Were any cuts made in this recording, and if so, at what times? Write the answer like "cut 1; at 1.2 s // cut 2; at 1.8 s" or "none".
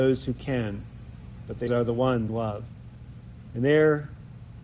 cut 1; at 1.7 s // cut 2; at 2.3 s